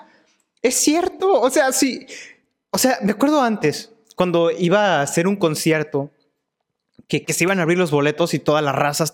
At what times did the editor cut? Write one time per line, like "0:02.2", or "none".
0:07.2